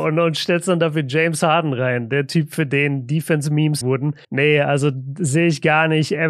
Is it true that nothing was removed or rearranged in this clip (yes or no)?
no